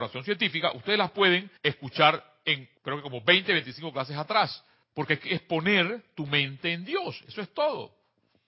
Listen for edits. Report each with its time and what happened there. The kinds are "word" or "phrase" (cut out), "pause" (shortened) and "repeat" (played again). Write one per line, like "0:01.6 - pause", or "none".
0:01.6 - pause
0:02.8 - pause
0:04.8 - pause